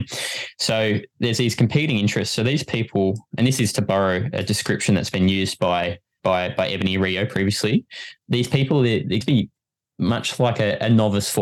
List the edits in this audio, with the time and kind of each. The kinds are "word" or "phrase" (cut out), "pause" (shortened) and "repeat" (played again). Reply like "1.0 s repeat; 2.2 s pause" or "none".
6.2 s word; 8.2 s word; 9.2 s word